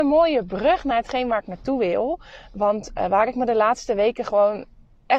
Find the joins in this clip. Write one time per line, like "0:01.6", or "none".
none